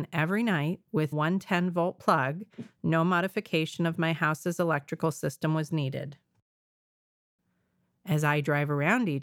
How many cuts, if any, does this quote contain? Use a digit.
1